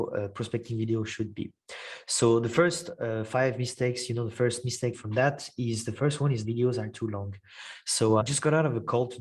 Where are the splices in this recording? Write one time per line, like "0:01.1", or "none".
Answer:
0:04.9
0:06.4
0:08.2